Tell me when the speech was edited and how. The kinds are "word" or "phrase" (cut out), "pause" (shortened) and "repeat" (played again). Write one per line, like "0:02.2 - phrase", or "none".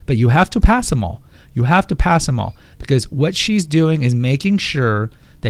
none